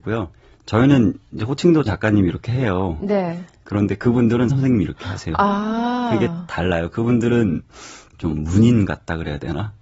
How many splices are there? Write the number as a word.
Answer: three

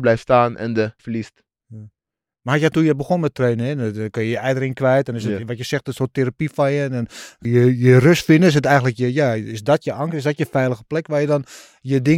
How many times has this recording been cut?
three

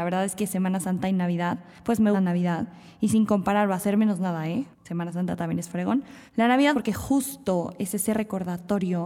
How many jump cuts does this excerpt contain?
four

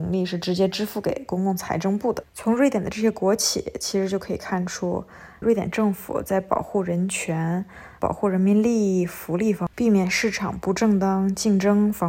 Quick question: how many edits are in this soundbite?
four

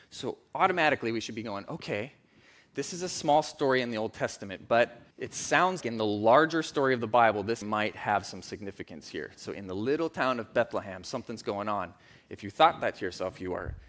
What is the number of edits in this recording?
three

